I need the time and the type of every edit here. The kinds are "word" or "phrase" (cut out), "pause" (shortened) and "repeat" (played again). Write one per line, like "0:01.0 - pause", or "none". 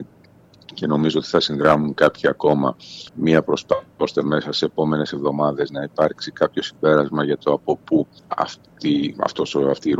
0:03.1 - pause
0:03.9 - pause
0:08.2 - word